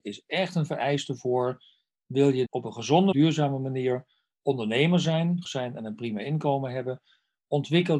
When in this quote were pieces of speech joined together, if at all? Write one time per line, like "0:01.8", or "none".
0:02.5
0:03.1
0:05.4